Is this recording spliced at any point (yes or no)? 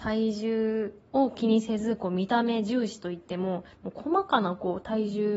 yes